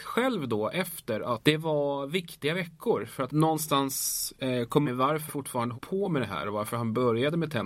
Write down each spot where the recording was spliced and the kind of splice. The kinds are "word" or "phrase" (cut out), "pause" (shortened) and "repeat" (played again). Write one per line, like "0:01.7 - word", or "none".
0:01.4 - word
0:03.3 - word
0:04.8 - word
0:05.3 - word
0:05.7 - word